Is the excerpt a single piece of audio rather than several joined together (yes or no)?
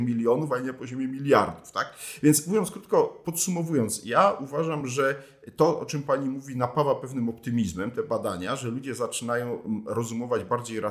yes